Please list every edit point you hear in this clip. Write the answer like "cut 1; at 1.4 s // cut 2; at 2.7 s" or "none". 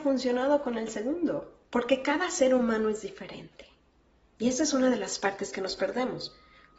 cut 1; at 1.7 s